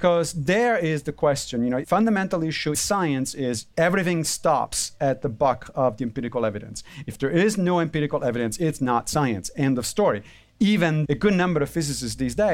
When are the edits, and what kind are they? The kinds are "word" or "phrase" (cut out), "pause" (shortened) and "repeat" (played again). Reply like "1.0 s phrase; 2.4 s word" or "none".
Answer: 1.8 s word; 2.7 s word; 3.7 s word; 11.1 s word